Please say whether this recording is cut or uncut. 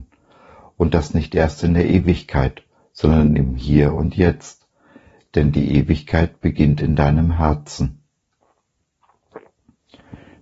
uncut